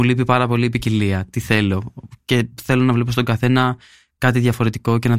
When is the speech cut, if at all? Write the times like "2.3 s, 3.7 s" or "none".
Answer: none